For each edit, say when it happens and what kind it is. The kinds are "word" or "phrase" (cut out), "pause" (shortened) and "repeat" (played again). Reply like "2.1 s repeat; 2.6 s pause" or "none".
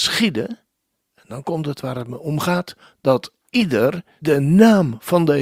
4.2 s word